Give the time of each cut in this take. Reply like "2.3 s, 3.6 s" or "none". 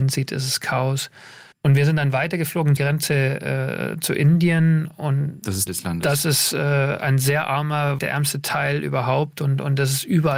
1.5 s, 2.8 s, 5.7 s, 8.0 s